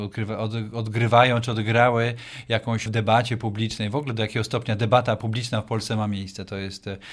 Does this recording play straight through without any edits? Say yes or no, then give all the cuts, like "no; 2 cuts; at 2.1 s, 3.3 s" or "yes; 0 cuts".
no; 1 cut; at 2.9 s